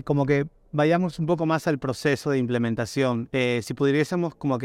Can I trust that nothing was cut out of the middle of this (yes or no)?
yes